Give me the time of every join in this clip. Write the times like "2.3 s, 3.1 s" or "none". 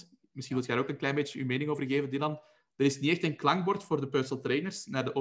none